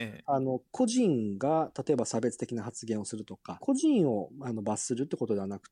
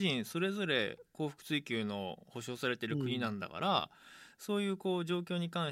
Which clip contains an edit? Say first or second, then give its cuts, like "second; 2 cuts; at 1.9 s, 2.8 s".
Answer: first; 1 cut; at 3.6 s